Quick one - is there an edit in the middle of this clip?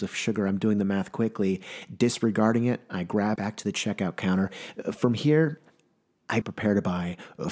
yes; 2 cuts; at 3.4 s, 6.4 s

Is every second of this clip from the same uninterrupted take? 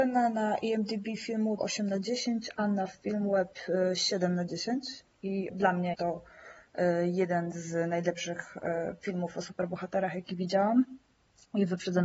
no; 3 cuts; at 1.6 s, 5.5 s, 5.9 s

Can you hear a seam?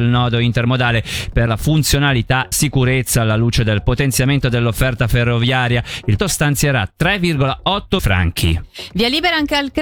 yes; 4 cuts; at 1.5 s, 2.5 s, 6.2 s, 8.0 s

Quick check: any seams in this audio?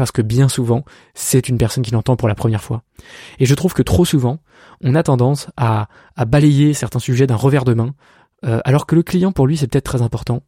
no; 0 cuts

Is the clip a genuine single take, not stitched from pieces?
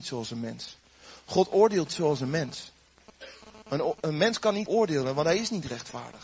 no; 2 cuts; at 1.9 s, 4.7 s

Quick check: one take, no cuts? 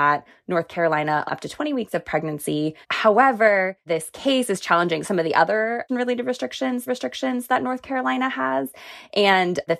no; 4 cuts; at 1.3 s, 2.8 s, 5.9 s, 6.9 s

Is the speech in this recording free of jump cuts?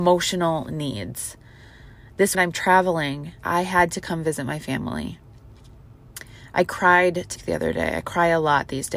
no; 3 cuts; at 2.3 s, 3.4 s, 7.4 s

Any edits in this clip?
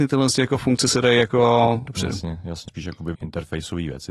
yes; 3 cuts; at 1.9 s, 2.7 s, 3.1 s

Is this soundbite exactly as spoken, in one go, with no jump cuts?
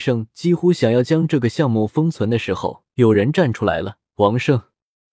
no; 2 cuts; at 2.9 s, 4.1 s

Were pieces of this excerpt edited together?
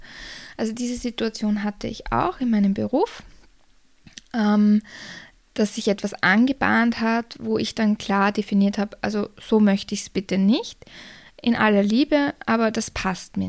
no; 0 cuts

